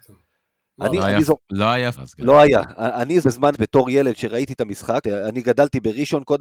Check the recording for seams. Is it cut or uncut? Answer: cut